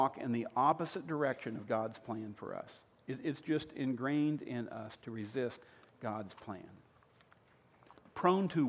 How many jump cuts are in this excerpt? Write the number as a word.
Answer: zero